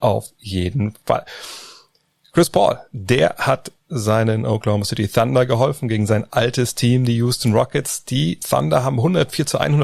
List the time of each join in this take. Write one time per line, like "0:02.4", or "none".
none